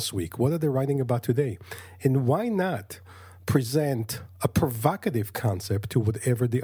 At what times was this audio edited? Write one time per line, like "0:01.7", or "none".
none